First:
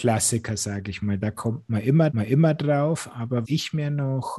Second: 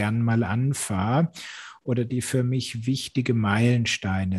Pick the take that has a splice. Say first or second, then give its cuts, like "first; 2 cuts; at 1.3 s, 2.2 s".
first; 2 cuts; at 2.1 s, 3.4 s